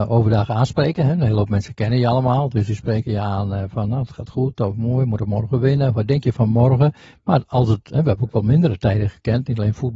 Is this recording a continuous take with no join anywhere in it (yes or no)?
yes